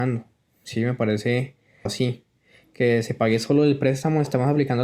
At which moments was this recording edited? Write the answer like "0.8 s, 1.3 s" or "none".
1.9 s